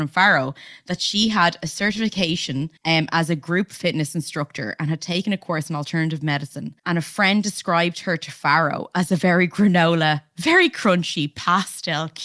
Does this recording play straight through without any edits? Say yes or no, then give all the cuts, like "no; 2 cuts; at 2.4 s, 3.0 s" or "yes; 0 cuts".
no; 2 cuts; at 2.8 s, 6.8 s